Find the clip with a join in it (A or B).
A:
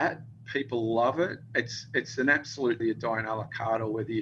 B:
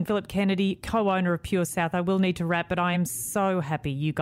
A